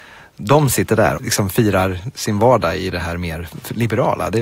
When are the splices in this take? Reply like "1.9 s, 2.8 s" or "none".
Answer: 1.2 s